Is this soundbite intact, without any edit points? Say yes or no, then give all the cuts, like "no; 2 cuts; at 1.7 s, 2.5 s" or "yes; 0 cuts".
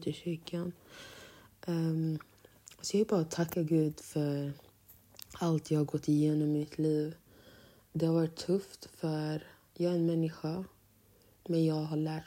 yes; 0 cuts